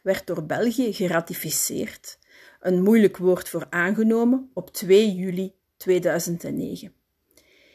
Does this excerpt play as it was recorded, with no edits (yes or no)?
yes